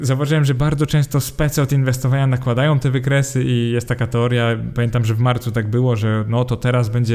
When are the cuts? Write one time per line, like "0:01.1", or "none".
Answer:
none